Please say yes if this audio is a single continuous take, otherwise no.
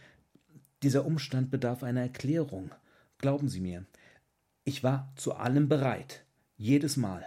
yes